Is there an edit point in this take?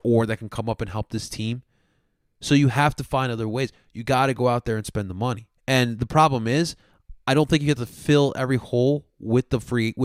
yes; 1 cut; at 5.6 s

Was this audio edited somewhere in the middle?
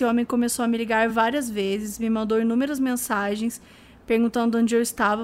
no; 0 cuts

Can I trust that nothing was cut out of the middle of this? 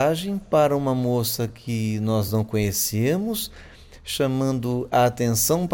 yes; 0 cuts

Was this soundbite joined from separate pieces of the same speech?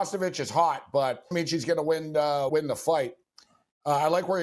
yes; 2 cuts; at 1.3 s, 2.5 s

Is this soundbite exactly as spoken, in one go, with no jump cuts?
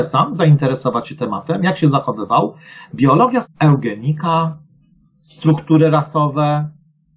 no; 2 cuts; at 1.2 s, 3.4 s

